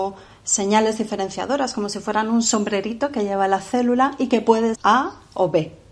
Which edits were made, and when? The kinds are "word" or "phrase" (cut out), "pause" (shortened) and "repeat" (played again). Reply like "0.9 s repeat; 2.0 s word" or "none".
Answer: 4.7 s word